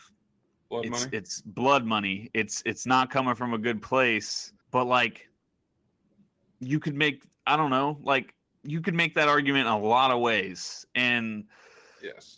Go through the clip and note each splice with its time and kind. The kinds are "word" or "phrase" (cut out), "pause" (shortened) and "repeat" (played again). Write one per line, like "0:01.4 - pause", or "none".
0:04.6 - pause
0:08.5 - pause